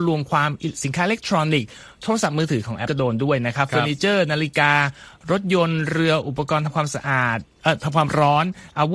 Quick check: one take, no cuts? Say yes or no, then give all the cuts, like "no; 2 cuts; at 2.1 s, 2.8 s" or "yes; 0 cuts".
no; 1 cut; at 2.9 s